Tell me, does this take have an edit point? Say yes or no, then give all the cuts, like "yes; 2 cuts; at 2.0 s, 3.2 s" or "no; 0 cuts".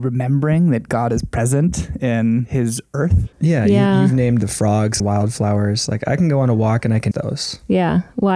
yes; 3 cuts; at 3.3 s, 5.0 s, 7.1 s